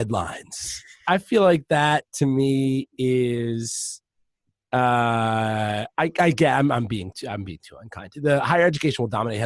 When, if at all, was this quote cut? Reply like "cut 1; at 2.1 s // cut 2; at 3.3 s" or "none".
none